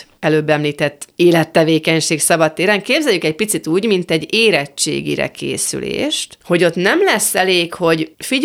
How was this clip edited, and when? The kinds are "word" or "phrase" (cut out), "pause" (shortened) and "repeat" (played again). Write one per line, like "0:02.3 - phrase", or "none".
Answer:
none